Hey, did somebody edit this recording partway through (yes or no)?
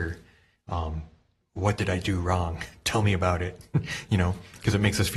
no